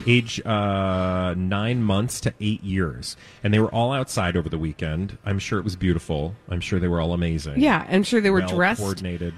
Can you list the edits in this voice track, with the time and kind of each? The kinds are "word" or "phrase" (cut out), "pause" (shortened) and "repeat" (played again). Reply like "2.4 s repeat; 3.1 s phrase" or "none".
none